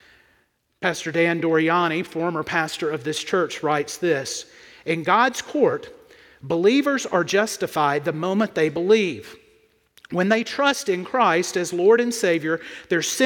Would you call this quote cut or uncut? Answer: uncut